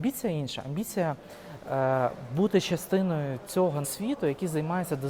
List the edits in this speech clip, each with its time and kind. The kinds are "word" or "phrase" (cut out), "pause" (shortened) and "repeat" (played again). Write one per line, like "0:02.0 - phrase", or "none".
0:03.8 - word